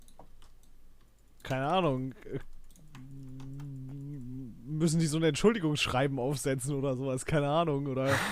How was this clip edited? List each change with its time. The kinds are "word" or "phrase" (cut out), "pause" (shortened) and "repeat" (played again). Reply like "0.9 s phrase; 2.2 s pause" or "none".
none